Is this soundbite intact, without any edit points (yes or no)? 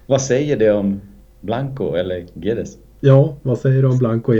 no